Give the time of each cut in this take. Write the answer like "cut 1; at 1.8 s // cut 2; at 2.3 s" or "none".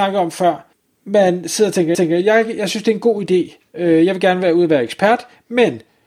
cut 1; at 1.9 s